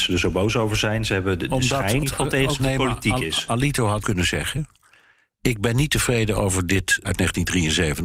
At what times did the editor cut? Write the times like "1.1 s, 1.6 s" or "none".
2.0 s, 2.6 s, 4.0 s, 7.0 s